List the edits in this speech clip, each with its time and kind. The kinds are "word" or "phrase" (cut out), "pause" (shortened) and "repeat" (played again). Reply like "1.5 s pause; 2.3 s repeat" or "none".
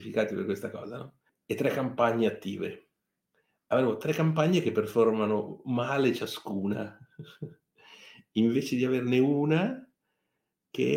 1.3 s pause